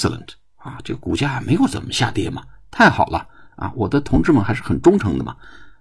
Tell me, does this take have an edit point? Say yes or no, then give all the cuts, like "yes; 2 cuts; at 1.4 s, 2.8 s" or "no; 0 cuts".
no; 0 cuts